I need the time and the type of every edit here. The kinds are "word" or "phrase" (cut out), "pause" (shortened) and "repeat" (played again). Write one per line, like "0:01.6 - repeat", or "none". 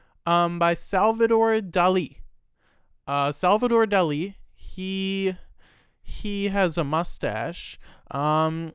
none

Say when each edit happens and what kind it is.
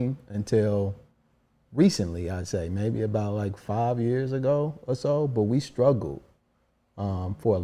none

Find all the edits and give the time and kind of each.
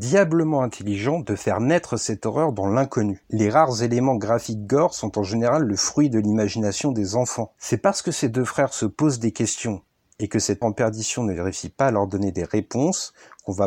0:10.6 - word

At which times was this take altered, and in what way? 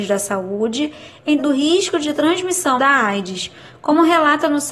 0:01.4 - word
0:02.8 - word

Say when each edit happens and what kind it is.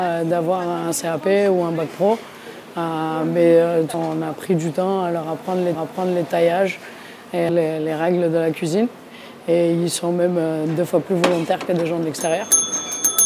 0:03.9 - word
0:05.7 - repeat
0:07.5 - phrase

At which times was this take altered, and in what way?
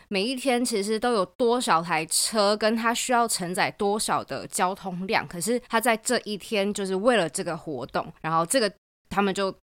0:05.7 - pause
0:08.2 - pause

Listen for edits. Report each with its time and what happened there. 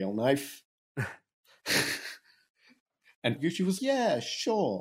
0:03.4 - word
0:03.8 - word

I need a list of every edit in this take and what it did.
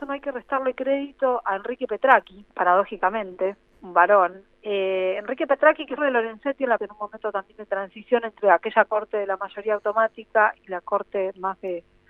0:02.5 - pause
0:04.5 - pause
0:06.0 - phrase
0:06.8 - phrase

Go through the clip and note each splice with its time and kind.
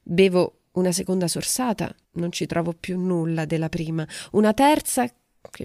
0:02.0 - pause

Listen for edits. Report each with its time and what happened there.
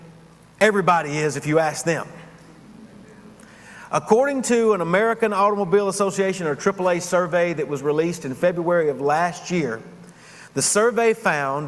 none

